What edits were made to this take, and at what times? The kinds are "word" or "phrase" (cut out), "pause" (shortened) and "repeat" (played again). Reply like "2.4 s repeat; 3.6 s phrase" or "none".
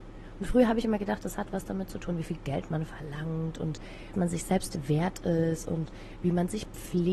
4.1 s word